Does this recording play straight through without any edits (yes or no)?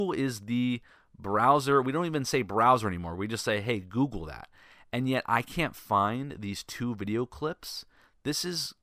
yes